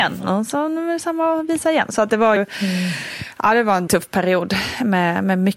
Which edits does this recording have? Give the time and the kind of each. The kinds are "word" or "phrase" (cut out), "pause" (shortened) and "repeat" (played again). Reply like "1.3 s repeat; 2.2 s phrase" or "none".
2.4 s word; 3.9 s word

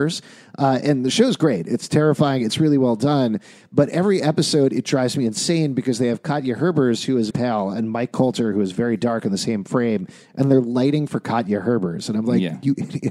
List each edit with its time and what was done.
7.3 s word

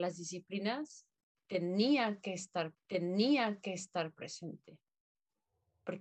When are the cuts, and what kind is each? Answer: 2.7 s repeat

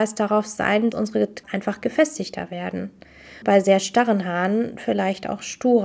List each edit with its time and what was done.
0.9 s word; 1.4 s phrase; 3.4 s word

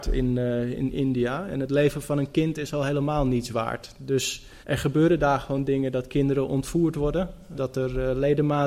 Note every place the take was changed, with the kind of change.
4.6 s pause; 7.6 s word

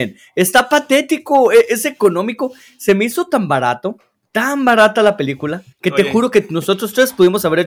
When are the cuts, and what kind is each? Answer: 5.7 s pause

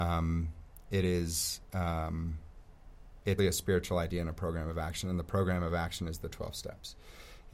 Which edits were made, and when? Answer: 3.4 s word

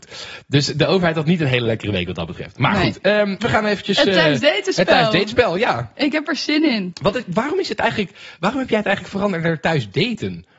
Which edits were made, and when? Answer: 3.4 s phrase

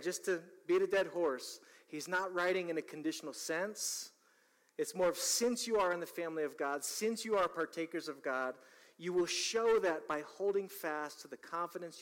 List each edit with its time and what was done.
none

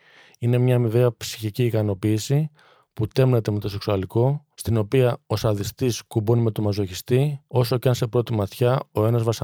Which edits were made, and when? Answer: 4.5 s pause; 7.5 s pause

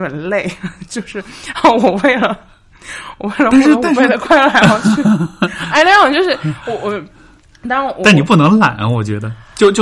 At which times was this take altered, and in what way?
none

